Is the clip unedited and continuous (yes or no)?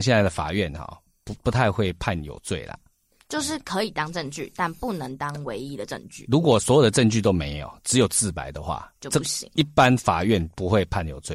no